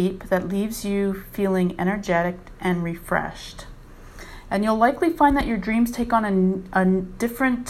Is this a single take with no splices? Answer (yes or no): yes